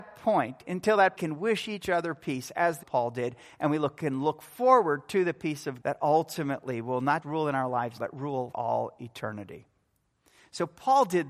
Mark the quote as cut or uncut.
cut